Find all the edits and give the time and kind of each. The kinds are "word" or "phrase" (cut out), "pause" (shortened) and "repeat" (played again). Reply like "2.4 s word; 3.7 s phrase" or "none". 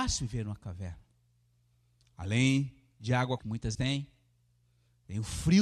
3.4 s word; 3.7 s word